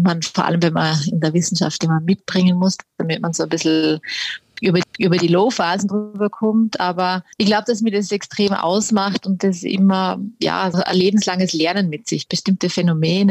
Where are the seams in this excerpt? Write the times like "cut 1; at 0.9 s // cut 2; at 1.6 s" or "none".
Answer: cut 1; at 1.8 s // cut 2; at 2.9 s // cut 3; at 4.8 s // cut 4; at 7.3 s // cut 5; at 10.7 s // cut 6; at 12.3 s